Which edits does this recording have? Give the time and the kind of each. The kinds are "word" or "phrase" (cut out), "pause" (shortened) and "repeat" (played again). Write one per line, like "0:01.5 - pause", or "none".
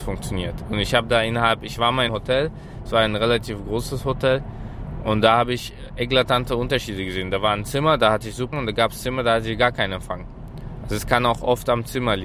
0:02.1 - word
0:08.5 - word

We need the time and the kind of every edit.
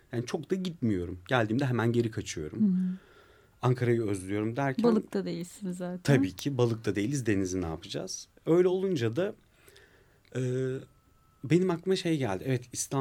none

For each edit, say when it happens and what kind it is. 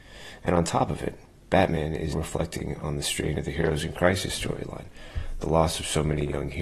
0:02.1 - word

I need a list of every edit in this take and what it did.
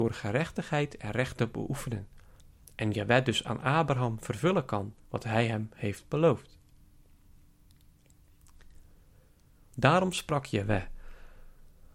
0:02.4 - pause
0:05.0 - pause

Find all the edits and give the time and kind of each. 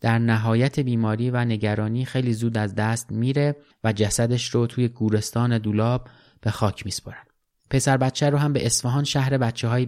none

